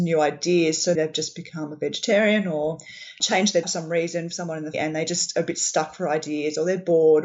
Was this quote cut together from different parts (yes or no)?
yes